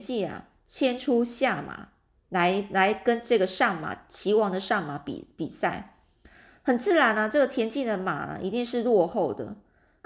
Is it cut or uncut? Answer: uncut